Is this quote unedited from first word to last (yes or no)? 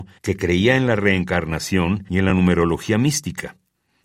yes